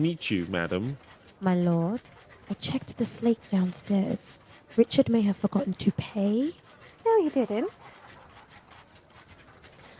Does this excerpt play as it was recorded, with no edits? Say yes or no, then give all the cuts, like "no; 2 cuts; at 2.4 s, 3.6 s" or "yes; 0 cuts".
yes; 0 cuts